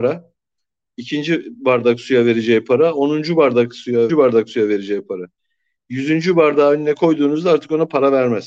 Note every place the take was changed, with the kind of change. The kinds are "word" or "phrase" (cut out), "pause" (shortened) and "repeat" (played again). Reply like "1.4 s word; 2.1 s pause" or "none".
4.1 s phrase